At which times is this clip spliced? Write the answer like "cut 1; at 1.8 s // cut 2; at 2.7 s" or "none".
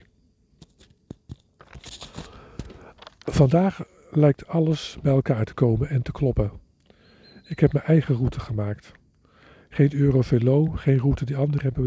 none